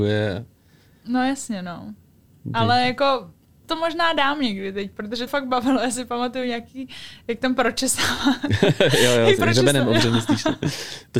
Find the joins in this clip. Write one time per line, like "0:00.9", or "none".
0:03.6
0:05.3
0:09.4